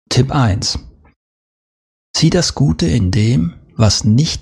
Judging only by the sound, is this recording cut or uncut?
uncut